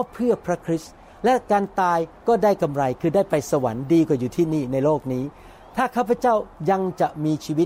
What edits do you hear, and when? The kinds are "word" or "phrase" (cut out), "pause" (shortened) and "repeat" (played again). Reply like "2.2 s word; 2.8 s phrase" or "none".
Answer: none